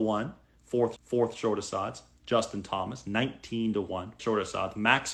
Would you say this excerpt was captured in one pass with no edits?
no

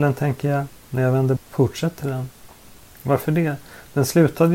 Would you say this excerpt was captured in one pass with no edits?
no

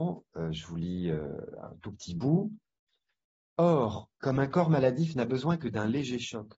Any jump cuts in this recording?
yes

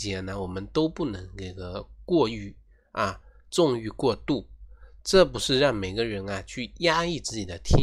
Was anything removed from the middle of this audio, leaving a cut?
no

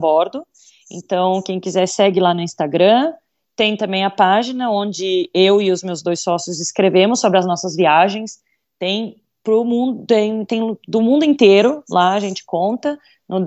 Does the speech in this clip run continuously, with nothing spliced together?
yes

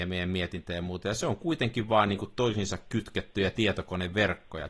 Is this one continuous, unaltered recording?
yes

